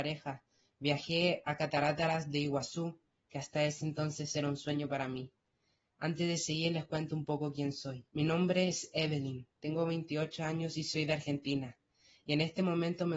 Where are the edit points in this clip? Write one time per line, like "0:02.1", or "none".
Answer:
0:08.1